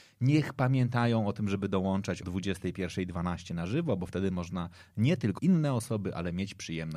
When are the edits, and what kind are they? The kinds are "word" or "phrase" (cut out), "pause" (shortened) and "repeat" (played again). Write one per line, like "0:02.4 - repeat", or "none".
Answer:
0:02.2 - word
0:05.4 - phrase